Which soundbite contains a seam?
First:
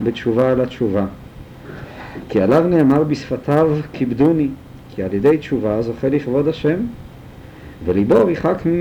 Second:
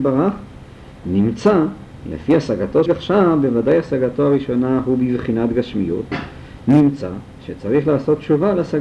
second; 1 cut; at 2.9 s

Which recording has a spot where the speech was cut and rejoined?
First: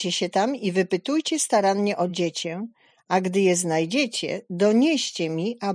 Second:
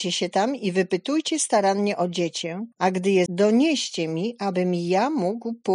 second; 2 cuts; at 2.7 s, 3.3 s

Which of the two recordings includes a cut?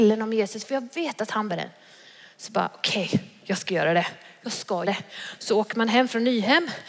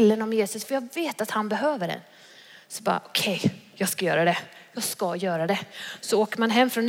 first; 2 cuts; at 1.5 s, 4.8 s

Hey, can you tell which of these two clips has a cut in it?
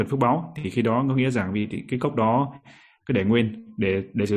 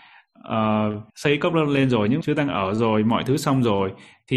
second; 2 cuts; at 1.1 s, 2.2 s

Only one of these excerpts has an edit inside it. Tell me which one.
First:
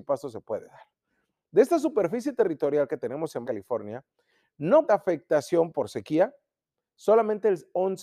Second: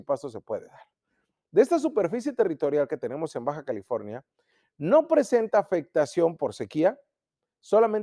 first; 2 cuts; at 3.4 s, 4.9 s

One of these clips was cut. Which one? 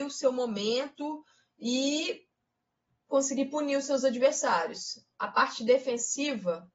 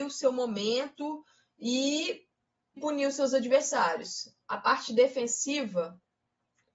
second; 1 cut; at 2.8 s

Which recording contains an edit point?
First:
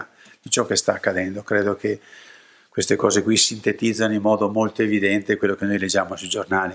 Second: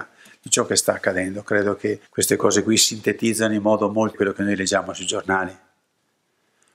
second; 2 cuts; at 2.1 s, 4.1 s

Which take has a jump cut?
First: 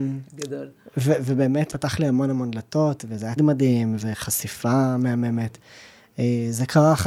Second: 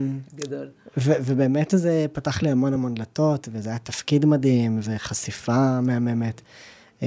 first; 2 cuts; at 1.7 s, 3.4 s

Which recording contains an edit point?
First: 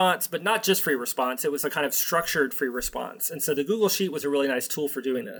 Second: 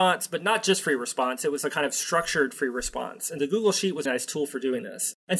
second; 2 cuts; at 3.4 s, 4.1 s

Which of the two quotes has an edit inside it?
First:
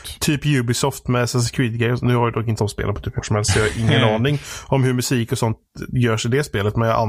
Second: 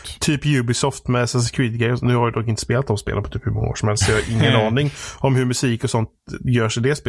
first; 2 cuts; at 2.6 s, 3.2 s

